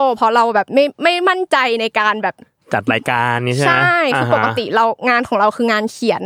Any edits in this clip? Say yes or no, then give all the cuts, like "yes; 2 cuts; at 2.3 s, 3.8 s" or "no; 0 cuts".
no; 0 cuts